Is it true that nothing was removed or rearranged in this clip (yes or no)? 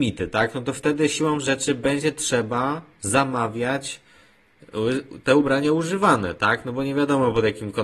yes